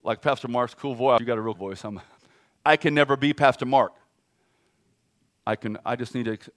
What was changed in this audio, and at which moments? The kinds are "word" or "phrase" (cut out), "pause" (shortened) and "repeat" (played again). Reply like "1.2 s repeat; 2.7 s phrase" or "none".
1.2 s phrase; 1.5 s phrase; 2.2 s pause